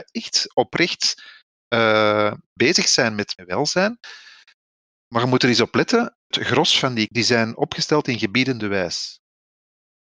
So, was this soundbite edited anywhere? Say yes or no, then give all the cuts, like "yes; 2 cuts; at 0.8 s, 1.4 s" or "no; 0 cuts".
yes; 4 cuts; at 2.6 s, 3.3 s, 6.3 s, 7.1 s